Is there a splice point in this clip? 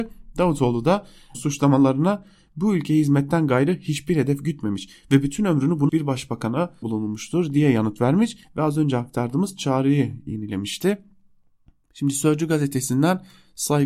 yes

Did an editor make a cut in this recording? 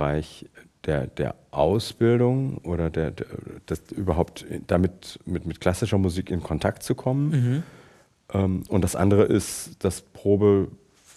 no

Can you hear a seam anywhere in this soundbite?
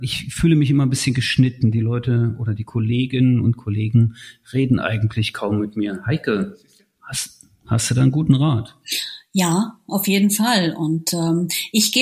no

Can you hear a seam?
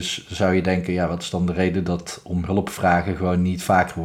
no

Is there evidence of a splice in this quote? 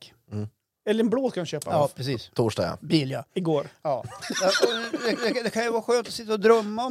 yes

